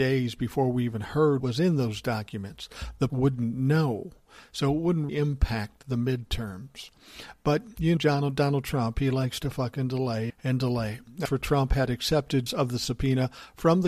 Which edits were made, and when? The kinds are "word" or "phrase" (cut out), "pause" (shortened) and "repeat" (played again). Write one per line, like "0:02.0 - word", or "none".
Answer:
0:01.4 - word
0:03.1 - word
0:05.1 - word
0:08.0 - word
0:10.3 - word
0:11.3 - word
0:12.5 - word